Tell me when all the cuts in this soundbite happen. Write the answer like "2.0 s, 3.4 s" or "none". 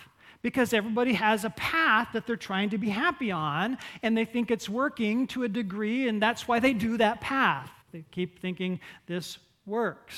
7.8 s